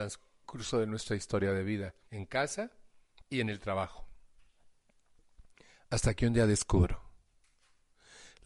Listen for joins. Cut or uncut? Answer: cut